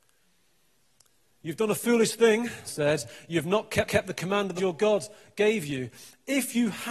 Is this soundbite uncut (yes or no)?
no